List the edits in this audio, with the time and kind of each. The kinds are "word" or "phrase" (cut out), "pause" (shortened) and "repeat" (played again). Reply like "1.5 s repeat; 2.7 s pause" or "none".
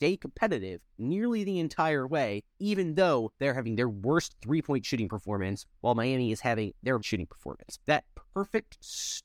0.9 s pause; 2.5 s pause; 7.0 s phrase; 7.8 s pause